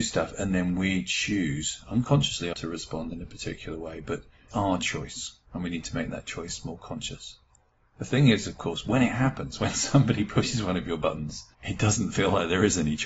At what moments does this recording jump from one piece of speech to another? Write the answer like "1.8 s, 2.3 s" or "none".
2.5 s, 4.5 s, 5.5 s, 11.5 s